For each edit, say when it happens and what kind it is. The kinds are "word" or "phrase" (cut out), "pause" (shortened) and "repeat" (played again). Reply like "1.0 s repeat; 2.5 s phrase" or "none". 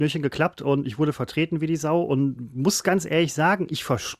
none